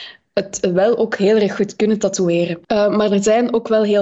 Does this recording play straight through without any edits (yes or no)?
no